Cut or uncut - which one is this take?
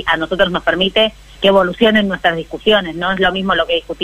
cut